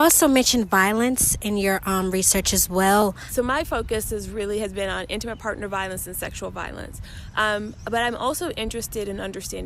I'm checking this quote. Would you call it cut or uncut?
uncut